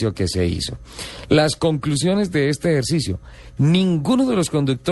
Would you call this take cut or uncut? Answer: uncut